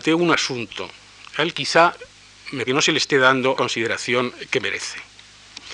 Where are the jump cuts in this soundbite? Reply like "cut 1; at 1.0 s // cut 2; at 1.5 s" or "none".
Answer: cut 1; at 1.5 s // cut 2; at 2.7 s // cut 3; at 3.6 s